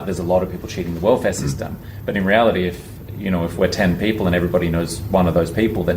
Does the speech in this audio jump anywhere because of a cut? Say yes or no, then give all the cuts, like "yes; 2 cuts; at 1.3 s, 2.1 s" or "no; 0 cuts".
no; 0 cuts